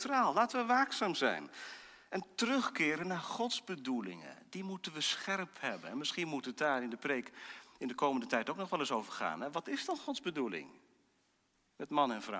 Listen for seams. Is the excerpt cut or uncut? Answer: uncut